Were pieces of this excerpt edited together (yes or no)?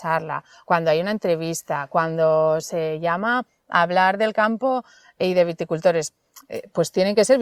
no